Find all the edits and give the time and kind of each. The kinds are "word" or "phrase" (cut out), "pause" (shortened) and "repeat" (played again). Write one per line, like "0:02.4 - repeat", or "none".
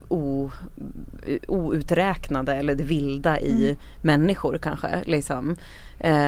none